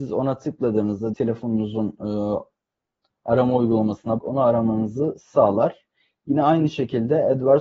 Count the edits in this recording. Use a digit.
2